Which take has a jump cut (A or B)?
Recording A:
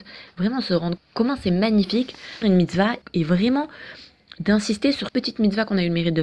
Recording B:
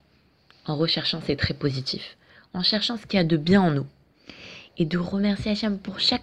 A